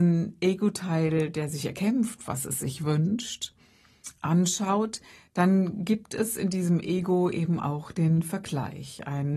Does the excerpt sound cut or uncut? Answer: uncut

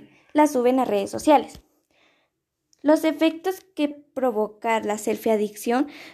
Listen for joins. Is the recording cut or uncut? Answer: cut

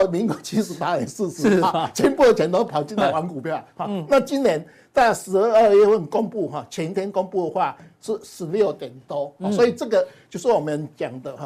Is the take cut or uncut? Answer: uncut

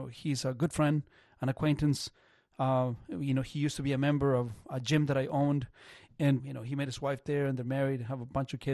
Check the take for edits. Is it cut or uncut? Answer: cut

